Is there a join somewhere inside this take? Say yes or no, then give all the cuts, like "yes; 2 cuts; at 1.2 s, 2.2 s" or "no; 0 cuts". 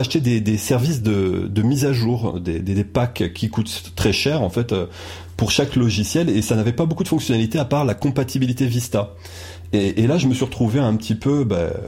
no; 0 cuts